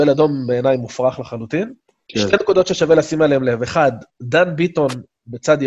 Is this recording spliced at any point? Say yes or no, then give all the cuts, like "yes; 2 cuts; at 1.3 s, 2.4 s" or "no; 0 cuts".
yes; 1 cut; at 1.8 s